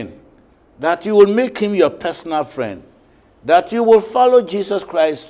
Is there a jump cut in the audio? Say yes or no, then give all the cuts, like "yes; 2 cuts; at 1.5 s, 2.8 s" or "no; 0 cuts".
no; 0 cuts